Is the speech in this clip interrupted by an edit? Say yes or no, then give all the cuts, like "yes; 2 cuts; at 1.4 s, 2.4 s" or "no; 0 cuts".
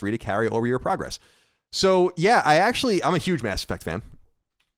no; 0 cuts